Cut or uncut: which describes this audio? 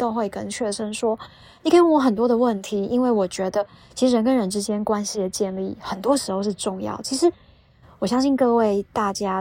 uncut